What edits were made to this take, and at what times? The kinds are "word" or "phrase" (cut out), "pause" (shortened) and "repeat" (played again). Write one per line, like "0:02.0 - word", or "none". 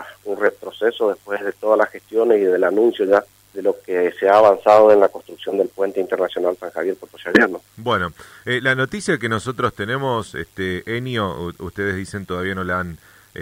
0:03.3 - pause
0:07.7 - pause